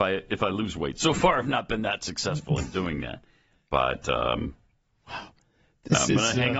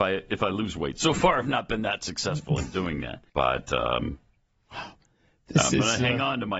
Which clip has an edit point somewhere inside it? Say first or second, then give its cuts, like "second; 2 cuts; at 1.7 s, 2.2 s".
second; 1 cut; at 3.3 s